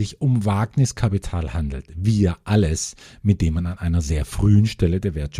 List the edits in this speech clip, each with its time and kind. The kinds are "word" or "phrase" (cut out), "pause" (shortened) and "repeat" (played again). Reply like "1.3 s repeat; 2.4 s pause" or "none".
none

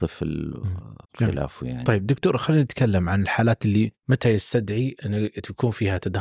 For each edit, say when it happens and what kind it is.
1.0 s pause; 4.0 s pause

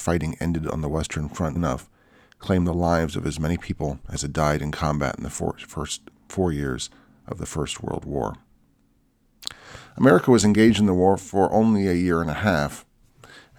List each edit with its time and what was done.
1.5 s phrase

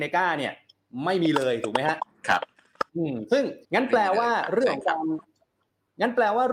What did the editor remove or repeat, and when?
2.9 s pause; 3.6 s pause

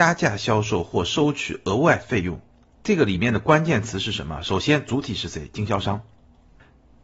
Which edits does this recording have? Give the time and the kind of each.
none

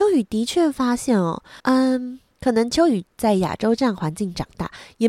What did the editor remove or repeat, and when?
1.6 s pause

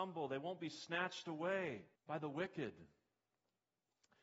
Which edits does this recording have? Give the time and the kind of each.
1.9 s pause

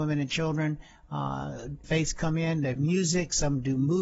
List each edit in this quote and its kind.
1.8 s word; 2.8 s word

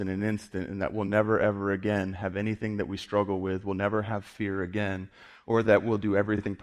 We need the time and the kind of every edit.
none

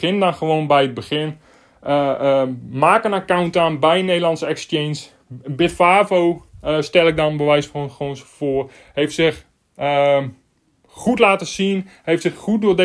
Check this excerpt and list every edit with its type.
none

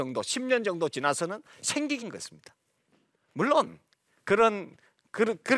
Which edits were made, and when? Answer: 2.0 s word

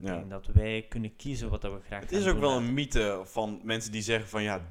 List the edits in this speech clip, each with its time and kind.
none

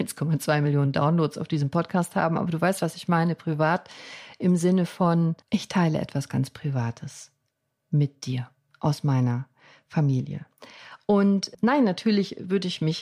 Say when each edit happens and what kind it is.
5.4 s pause

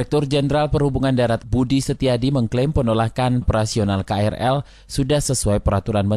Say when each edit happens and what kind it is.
1.4 s word; 3.4 s word

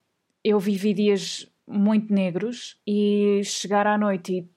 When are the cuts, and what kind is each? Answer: 1.6 s pause; 2.8 s pause

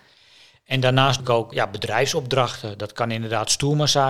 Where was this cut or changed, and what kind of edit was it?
1.2 s word; 1.5 s word

